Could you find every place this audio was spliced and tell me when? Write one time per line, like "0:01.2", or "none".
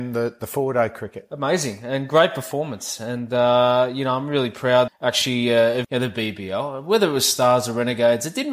0:04.9
0:05.8